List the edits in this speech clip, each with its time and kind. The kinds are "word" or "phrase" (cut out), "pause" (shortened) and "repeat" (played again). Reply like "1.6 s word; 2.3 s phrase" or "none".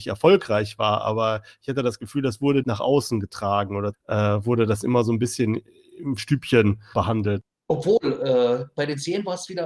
2.6 s word; 3.9 s word; 6.2 s word; 6.9 s word